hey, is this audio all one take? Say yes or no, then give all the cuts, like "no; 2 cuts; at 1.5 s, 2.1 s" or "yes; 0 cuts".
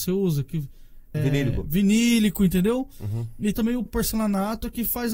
no; 3 cuts; at 1.1 s, 3.5 s, 3.9 s